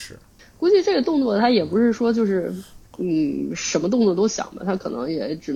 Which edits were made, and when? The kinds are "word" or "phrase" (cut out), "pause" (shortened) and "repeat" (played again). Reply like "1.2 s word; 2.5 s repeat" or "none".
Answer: 2.9 s pause